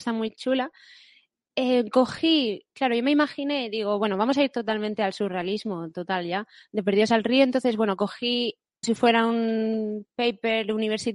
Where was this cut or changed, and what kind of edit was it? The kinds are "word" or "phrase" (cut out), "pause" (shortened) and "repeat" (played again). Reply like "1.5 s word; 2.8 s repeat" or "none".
8.8 s word